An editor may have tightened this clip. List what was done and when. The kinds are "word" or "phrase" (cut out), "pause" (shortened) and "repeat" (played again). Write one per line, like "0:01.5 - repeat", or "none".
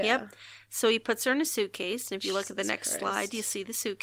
none